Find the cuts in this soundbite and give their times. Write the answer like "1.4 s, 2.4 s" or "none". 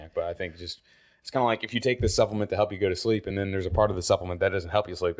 none